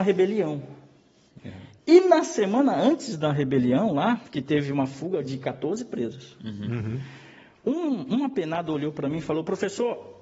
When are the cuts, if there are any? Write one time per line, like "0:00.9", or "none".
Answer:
none

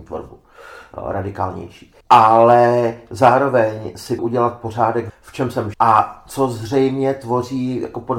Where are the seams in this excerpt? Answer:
0:02.0
0:04.2
0:05.1
0:05.7

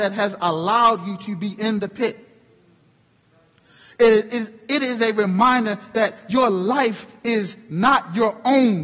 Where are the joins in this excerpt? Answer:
none

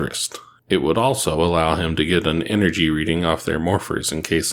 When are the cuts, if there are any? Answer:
none

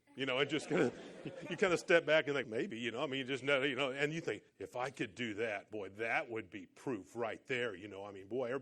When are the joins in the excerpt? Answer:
0:02.4
0:04.5

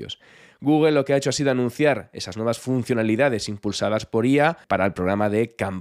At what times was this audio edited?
0:04.6

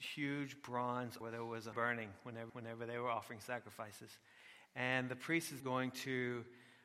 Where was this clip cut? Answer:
0:01.2
0:01.7
0:02.5
0:05.6

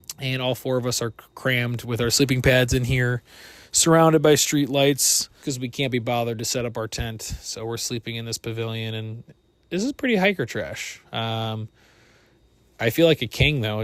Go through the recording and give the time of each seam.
0:05.4

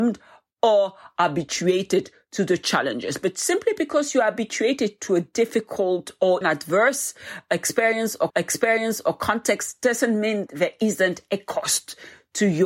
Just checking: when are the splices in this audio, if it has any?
0:06.4
0:08.3
0:10.5

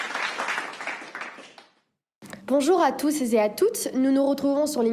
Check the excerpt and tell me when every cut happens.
0:02.4

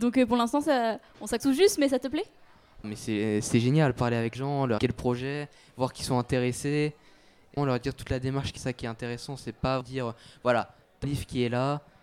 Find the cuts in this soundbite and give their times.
0:01.4
0:02.8
0:04.3
0:04.8
0:07.6
0:08.6
0:09.8
0:11.0

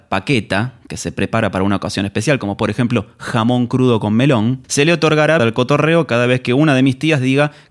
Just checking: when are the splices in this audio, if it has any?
0:04.6
0:05.4

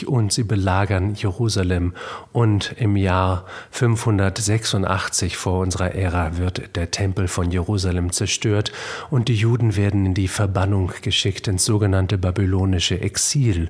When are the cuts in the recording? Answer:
none

